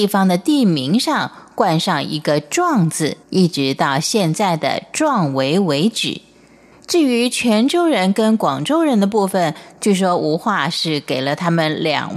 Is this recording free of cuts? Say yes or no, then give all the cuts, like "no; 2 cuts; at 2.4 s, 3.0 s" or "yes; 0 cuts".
no; 1 cut; at 3.2 s